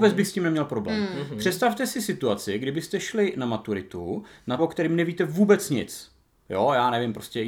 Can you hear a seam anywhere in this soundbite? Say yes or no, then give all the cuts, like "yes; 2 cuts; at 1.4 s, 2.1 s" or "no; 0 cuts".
yes; 1 cut; at 4.6 s